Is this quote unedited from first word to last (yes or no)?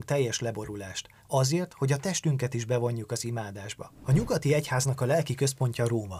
yes